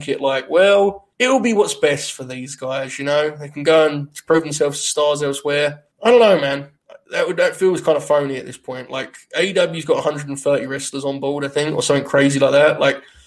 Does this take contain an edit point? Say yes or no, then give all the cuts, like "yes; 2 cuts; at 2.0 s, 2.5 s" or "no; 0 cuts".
yes; 2 cuts; at 1.1 s, 5.9 s